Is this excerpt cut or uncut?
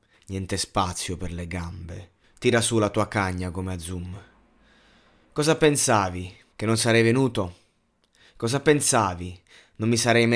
cut